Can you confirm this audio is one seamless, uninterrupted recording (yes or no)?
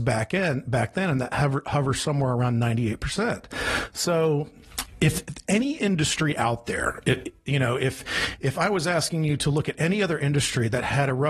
yes